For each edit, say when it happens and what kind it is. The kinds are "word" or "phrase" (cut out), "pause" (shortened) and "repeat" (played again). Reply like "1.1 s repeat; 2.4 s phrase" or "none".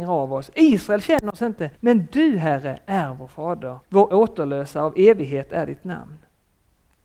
1.7 s pause; 3.8 s pause